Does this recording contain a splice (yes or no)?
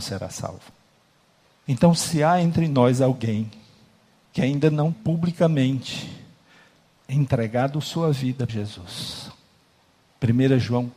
yes